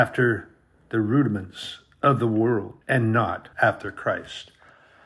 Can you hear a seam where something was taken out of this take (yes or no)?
yes